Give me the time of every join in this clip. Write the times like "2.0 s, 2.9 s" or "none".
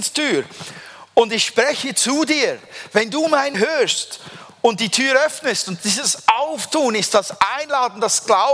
3.5 s